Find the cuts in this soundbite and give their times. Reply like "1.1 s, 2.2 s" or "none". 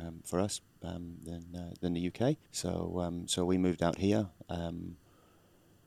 2.4 s